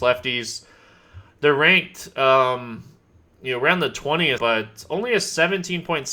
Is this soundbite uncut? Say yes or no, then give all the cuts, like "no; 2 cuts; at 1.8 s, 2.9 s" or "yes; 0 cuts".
no; 1 cut; at 4.4 s